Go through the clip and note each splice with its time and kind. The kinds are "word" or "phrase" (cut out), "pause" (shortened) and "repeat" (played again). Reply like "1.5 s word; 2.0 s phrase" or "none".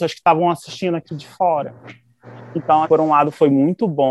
2.8 s word